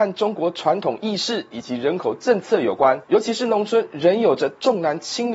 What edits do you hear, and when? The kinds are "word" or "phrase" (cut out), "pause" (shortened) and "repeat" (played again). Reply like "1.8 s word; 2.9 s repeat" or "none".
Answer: 3.0 s pause